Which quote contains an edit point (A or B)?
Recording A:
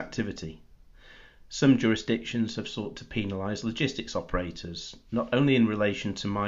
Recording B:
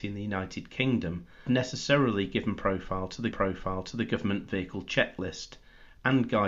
B